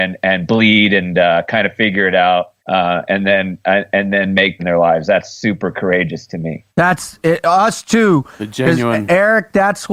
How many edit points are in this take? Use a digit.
3